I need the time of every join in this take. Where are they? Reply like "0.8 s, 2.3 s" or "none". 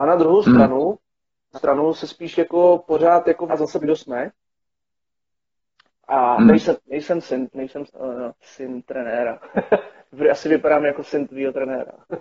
1.5 s, 3.5 s, 3.8 s, 7.9 s, 8.4 s